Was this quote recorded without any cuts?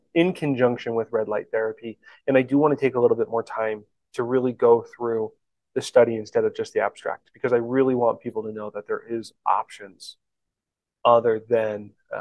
yes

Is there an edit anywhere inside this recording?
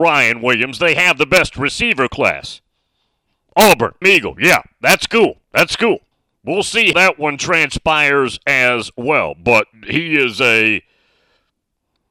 yes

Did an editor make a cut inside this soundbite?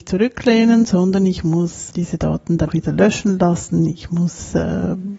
yes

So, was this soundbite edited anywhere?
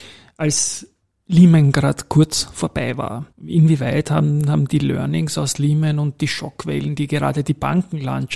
yes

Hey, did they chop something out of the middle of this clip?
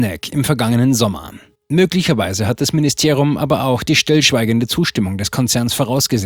yes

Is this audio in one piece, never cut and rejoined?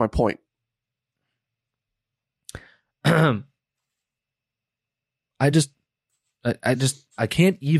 yes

